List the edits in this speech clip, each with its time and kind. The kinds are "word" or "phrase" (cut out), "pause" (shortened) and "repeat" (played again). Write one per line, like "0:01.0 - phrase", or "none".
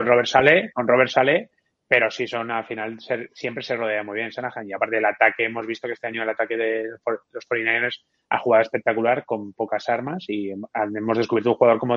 none